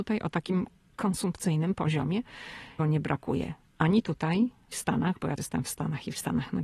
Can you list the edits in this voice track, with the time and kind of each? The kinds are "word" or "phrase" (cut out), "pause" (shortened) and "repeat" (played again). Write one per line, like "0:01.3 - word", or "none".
0:02.8 - word
0:04.7 - word
0:05.4 - word